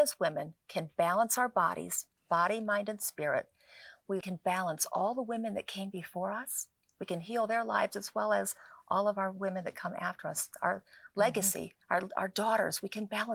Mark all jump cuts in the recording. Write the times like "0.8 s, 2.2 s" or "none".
2.2 s, 4.2 s, 11.8 s